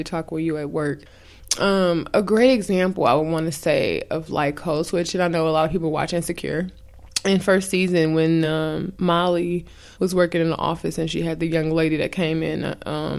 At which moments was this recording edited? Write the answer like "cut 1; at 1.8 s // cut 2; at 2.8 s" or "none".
none